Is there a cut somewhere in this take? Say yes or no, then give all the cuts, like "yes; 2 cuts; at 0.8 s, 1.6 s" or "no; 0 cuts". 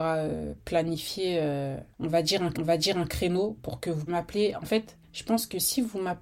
yes; 4 cuts; at 1.9 s, 2.5 s, 4.1 s, 5.0 s